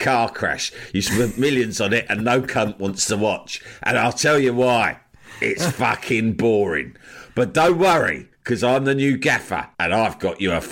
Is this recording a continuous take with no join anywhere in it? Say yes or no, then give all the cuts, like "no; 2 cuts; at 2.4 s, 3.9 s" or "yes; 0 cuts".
no; 2 cuts; at 8.3 s, 9.7 s